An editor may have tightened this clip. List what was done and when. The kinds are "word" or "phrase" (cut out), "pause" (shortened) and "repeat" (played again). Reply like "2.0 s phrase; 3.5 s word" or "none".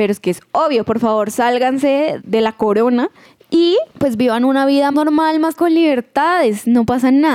2.2 s word; 3.9 s pause; 4.9 s word; 5.6 s word